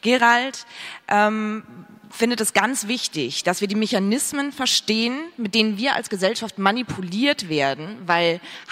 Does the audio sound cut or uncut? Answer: uncut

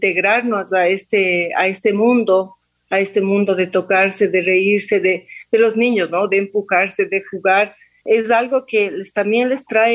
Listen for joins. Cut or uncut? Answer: uncut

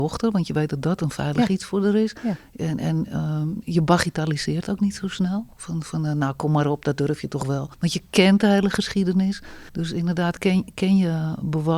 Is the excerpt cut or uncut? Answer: cut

